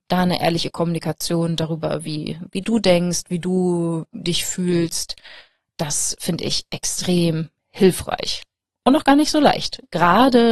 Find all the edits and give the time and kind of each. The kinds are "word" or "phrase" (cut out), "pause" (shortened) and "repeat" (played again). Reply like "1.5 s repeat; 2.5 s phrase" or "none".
none

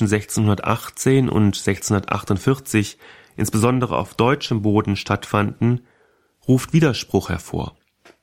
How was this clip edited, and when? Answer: none

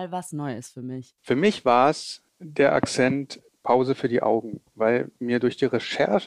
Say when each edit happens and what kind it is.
1.2 s pause; 2.3 s pause

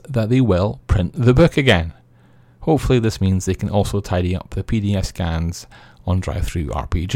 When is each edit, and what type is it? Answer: none

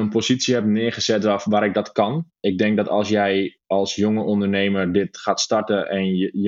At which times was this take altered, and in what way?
2.3 s pause

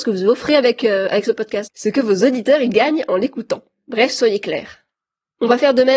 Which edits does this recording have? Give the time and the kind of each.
none

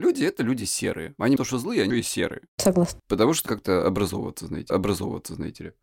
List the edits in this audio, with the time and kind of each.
1.4 s word; 1.9 s word; 3.5 s phrase; 4.7 s repeat

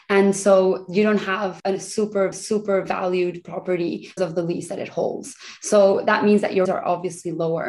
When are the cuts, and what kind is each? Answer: 1.6 s word; 2.3 s repeat; 4.2 s word; 6.7 s word

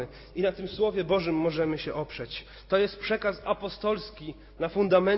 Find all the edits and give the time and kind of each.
none

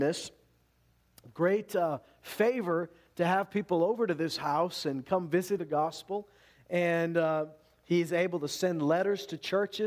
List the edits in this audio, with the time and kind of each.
5.6 s phrase

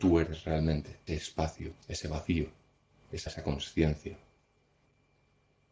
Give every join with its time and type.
1.1 s word; 1.8 s pause; 3.3 s word

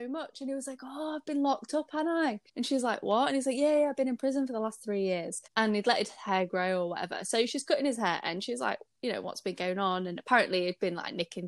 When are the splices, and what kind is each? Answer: 2.5 s pause; 5.5 s pause

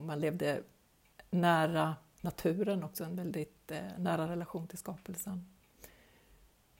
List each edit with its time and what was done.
none

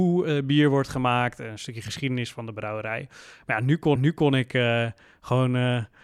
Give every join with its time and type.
4.0 s repeat

